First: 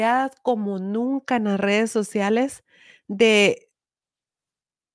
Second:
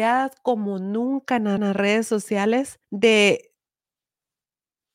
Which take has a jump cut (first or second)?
second